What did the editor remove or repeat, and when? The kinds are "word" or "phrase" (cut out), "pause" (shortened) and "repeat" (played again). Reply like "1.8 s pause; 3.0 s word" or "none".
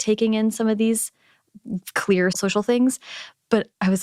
2.3 s word